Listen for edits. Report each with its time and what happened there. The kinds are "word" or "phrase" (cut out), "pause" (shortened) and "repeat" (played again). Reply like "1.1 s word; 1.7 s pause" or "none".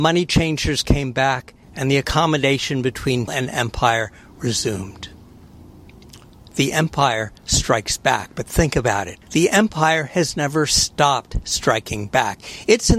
1.6 s pause; 3.3 s word; 6.3 s pause; 9.2 s pause